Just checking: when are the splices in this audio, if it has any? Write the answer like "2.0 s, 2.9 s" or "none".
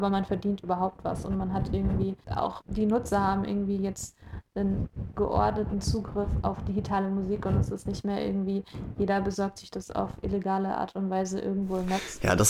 none